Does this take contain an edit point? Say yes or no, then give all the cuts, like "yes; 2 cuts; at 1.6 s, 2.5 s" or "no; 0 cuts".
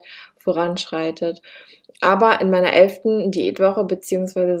no; 0 cuts